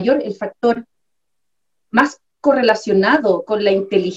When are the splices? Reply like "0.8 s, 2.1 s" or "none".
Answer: none